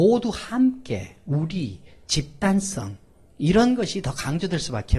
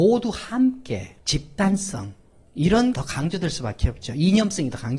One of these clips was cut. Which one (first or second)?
second